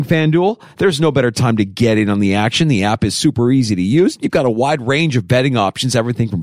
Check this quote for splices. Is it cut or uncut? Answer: uncut